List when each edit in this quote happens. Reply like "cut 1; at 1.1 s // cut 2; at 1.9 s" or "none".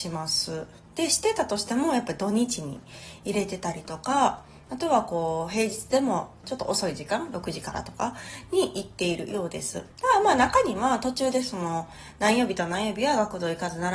cut 1; at 9.9 s